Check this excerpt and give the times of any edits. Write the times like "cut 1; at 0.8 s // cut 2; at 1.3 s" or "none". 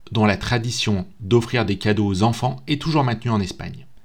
none